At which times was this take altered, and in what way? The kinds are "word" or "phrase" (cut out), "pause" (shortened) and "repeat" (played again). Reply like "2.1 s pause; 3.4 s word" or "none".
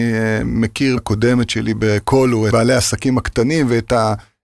1.0 s word; 2.5 s word